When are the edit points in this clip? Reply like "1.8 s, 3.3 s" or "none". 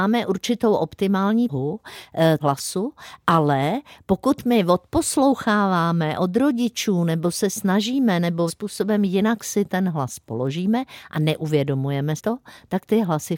1.5 s, 2.4 s, 8.5 s, 12.2 s